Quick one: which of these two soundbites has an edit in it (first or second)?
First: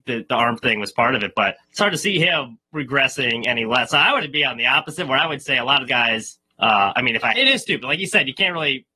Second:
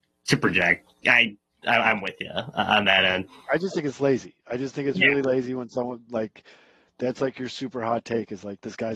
first